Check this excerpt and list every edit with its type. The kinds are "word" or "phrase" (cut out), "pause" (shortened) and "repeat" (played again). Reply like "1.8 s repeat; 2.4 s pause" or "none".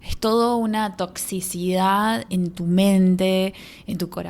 2.3 s word